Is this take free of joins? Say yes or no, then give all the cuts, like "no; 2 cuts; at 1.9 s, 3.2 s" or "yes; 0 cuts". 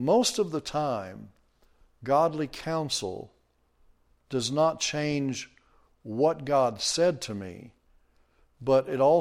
yes; 0 cuts